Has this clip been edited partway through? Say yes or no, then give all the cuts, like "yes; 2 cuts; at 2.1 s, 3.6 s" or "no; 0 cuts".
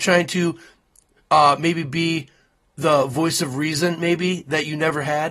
no; 0 cuts